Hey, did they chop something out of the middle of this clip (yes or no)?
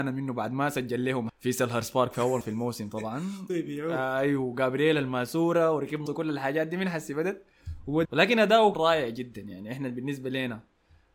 yes